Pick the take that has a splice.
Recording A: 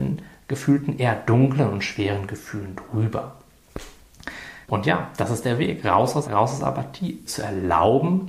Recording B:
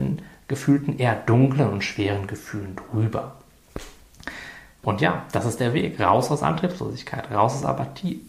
A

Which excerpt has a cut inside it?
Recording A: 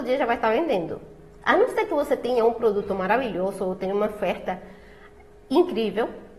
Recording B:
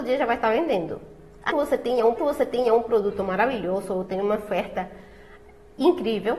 B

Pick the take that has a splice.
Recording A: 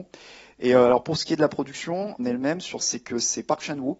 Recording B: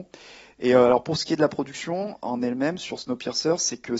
A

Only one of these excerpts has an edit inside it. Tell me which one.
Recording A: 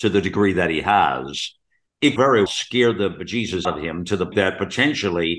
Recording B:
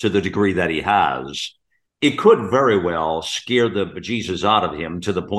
A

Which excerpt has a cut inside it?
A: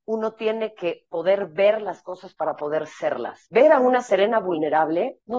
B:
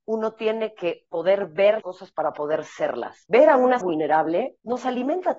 B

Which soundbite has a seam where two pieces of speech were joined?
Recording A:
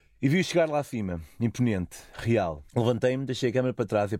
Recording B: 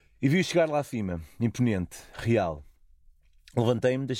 A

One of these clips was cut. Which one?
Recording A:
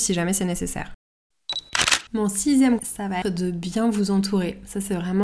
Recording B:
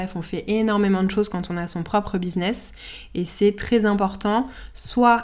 A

